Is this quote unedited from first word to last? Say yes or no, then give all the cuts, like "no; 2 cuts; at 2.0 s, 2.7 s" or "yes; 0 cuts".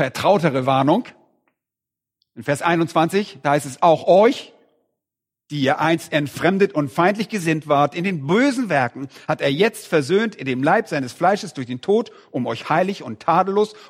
yes; 0 cuts